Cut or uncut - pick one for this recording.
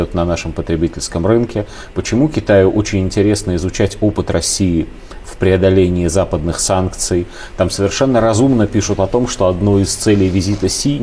uncut